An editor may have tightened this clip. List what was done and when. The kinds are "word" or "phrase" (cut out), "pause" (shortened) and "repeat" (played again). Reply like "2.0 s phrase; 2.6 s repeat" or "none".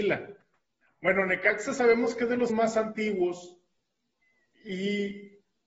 2.5 s word